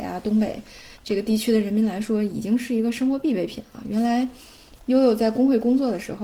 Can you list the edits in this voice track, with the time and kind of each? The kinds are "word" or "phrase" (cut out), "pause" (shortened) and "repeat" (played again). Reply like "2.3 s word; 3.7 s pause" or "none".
1.0 s pause